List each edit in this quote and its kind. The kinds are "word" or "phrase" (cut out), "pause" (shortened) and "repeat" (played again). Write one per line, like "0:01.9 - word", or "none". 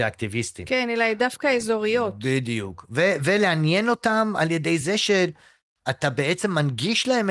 none